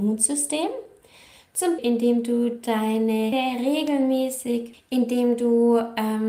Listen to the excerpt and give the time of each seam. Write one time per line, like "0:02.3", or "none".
0:01.8
0:03.3
0:04.7